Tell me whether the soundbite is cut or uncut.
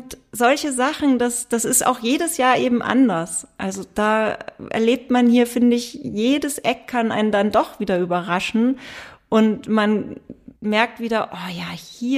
cut